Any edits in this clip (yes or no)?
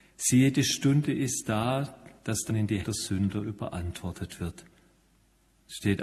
yes